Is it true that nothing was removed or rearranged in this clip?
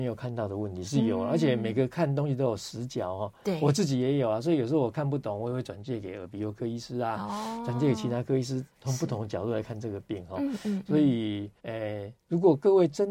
no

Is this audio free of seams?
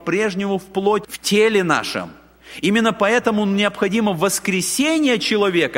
no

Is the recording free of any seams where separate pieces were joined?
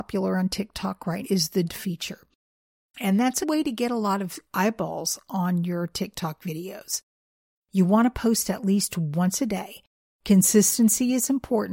no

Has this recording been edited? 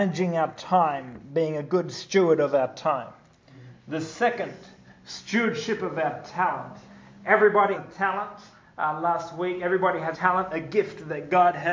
yes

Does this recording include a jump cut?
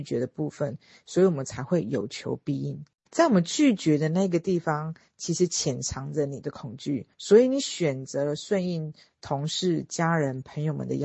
yes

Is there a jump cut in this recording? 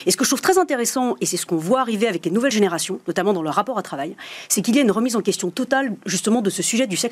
no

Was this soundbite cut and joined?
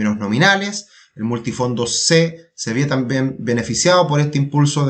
no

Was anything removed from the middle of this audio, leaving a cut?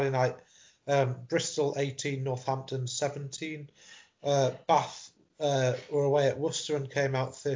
no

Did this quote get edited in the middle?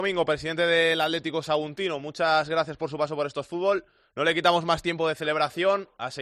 no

